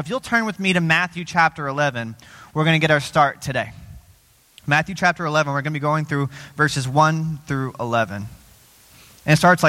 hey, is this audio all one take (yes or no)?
yes